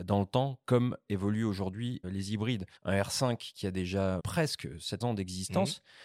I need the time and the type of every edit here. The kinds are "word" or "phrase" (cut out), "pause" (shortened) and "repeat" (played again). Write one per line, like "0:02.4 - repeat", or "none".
0:02.0 - word
0:02.8 - pause
0:04.2 - word
0:05.0 - phrase